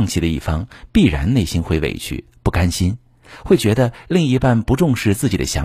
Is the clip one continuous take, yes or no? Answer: yes